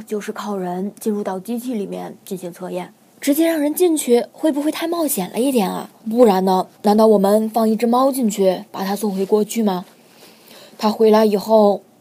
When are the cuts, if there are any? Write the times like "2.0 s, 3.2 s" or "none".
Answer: 3.1 s, 6.0 s, 6.7 s